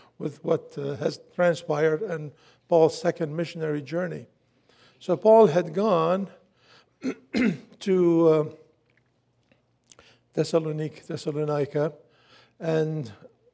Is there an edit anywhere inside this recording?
no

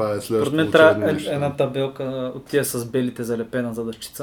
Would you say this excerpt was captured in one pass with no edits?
yes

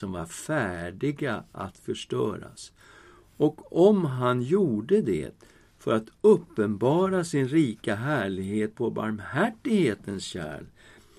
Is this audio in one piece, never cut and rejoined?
yes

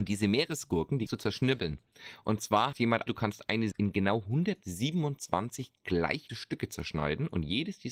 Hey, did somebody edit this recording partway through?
yes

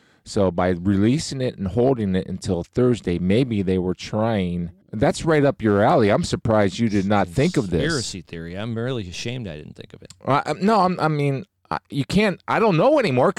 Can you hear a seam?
yes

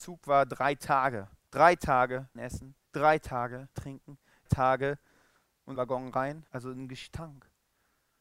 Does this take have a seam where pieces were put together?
yes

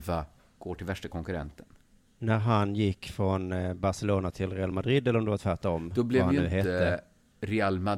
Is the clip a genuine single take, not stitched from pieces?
yes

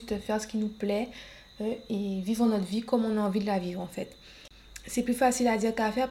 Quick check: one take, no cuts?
yes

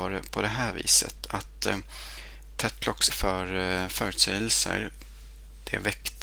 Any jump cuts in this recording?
yes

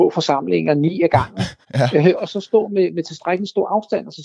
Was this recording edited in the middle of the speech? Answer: yes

